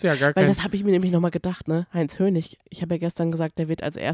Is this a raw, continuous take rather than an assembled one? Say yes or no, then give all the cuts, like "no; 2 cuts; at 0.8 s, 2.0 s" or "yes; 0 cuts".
yes; 0 cuts